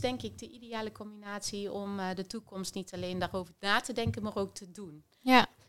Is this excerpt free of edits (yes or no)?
yes